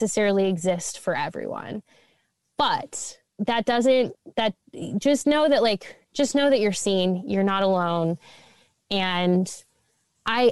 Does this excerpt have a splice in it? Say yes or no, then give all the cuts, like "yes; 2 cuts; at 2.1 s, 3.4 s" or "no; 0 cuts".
yes; 2 cuts; at 3.3 s, 6.0 s